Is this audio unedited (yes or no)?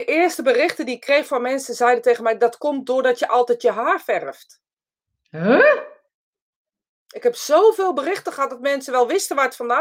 yes